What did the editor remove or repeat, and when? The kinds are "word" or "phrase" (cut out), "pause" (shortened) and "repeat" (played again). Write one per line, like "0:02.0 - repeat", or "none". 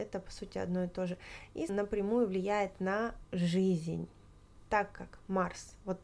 0:01.7 - word
0:03.2 - word